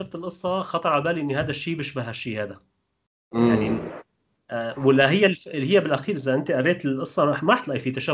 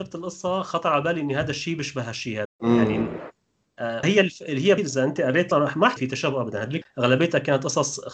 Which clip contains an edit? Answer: second; 6 cuts; at 2.4 s, 4.0 s, 4.8 s, 5.5 s, 6.0 s, 6.8 s

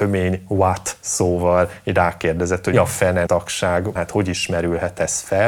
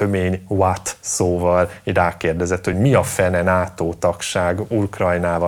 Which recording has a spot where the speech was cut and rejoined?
first; 3 cuts; at 2.7 s, 3.3 s, 4.0 s

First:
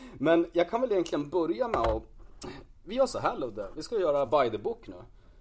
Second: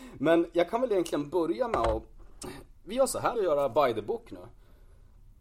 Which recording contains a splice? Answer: second; 1 cut; at 3.4 s

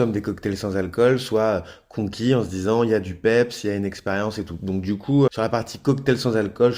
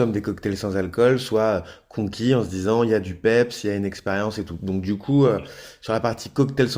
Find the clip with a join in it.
first; 1 cut; at 5.3 s

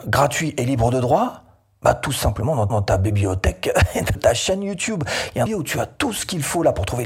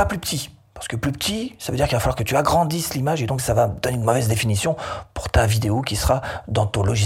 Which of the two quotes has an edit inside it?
first; 3 cuts; at 2.7 s, 4.1 s, 5.5 s

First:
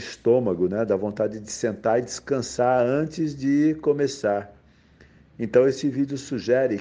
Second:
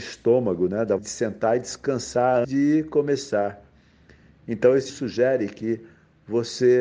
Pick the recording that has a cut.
second; 3 cuts; at 1.0 s, 2.4 s, 4.9 s

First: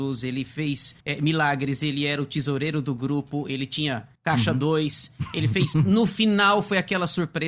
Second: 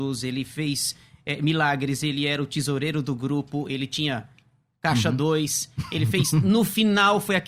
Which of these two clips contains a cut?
first; 2 cuts; at 1.0 s, 4.2 s

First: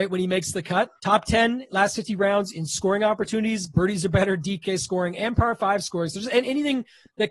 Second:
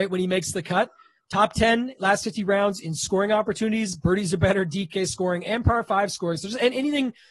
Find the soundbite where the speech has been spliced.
first; 1 cut; at 1.0 s

